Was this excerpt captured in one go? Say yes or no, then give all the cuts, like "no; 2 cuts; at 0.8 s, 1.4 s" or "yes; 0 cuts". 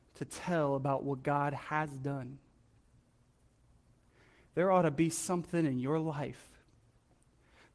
yes; 0 cuts